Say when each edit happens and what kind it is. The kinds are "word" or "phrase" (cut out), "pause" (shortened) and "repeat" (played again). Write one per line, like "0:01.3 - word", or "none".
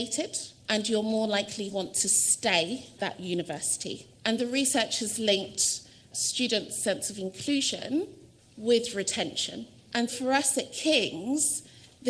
0:01.7 - word
0:03.0 - word
0:04.4 - word
0:10.1 - word